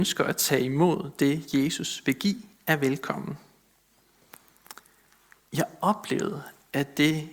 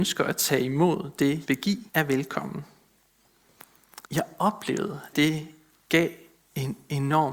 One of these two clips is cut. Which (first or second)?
second